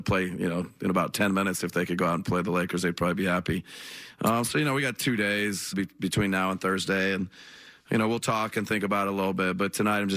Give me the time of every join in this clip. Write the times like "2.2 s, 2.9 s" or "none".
5.7 s